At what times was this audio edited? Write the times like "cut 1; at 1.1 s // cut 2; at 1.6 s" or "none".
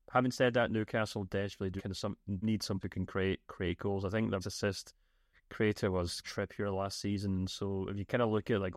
cut 1; at 1.8 s // cut 2; at 2.4 s // cut 3; at 2.8 s // cut 4; at 3.4 s // cut 5; at 4.4 s // cut 6; at 6.2 s